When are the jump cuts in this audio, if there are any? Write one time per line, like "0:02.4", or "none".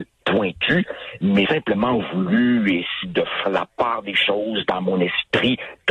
0:01.5
0:03.0
0:03.4